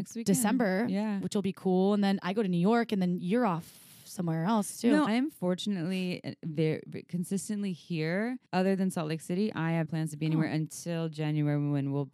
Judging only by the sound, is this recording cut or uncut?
cut